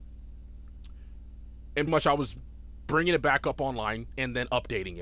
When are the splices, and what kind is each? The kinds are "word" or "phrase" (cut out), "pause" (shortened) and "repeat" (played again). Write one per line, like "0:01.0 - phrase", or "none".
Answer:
0:01.9 - word